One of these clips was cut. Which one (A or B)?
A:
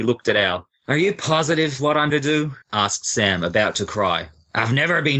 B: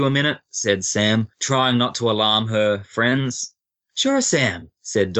A